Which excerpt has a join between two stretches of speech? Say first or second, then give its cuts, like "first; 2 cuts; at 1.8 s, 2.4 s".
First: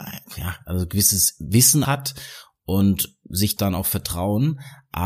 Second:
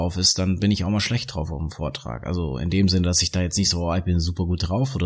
first; 2 cuts; at 1.8 s, 3.6 s